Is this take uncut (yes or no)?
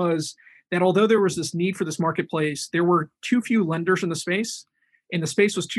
yes